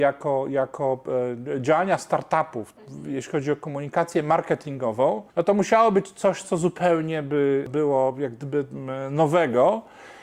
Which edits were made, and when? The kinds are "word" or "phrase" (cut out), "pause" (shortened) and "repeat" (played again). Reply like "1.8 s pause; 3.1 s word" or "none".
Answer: 5.3 s pause